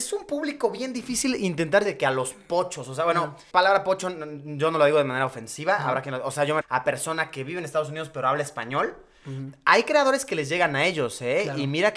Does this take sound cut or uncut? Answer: cut